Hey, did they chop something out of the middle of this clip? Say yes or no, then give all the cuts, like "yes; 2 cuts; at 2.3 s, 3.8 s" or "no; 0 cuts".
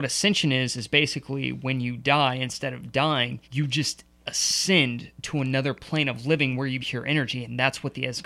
yes; 2 cuts; at 3.4 s, 6.8 s